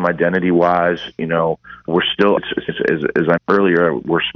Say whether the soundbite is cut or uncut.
cut